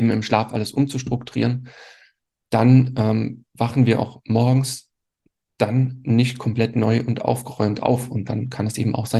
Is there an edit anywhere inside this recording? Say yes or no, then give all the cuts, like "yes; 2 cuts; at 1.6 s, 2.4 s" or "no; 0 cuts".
no; 0 cuts